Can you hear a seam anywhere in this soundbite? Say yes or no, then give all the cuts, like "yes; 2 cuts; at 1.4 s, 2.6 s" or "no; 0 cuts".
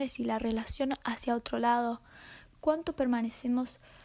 no; 0 cuts